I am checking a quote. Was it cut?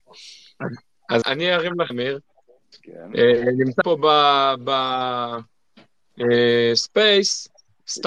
yes; 3 cuts; at 1.2 s, 1.9 s, 3.8 s

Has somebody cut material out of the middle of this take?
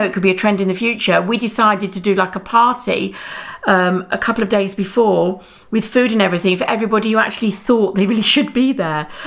no; 0 cuts

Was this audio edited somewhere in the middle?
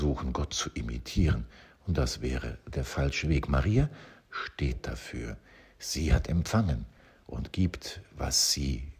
no; 0 cuts

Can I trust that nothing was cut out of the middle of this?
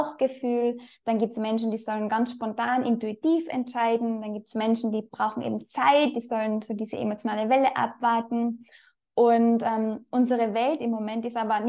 yes; 0 cuts

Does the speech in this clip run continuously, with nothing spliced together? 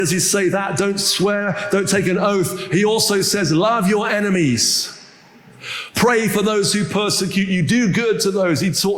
yes; 0 cuts

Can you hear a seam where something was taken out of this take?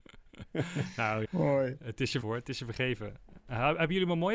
yes; 2 cuts; at 1.2 s, 2.2 s

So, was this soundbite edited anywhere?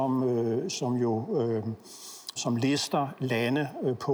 yes; 1 cut; at 2.4 s

